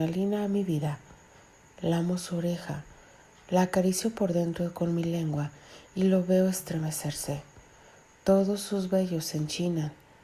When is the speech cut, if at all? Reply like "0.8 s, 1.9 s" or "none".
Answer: none